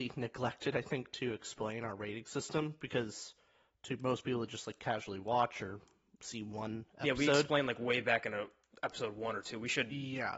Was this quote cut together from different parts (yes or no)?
no